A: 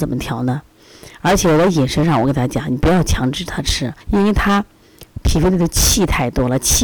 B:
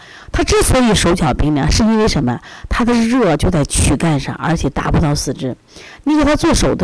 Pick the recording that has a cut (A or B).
A